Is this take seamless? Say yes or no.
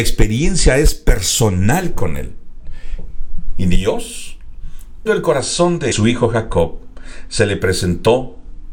no